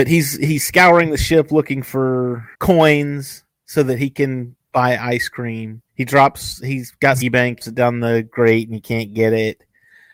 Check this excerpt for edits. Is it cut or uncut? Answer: cut